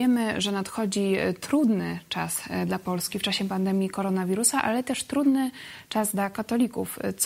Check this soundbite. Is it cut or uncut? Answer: uncut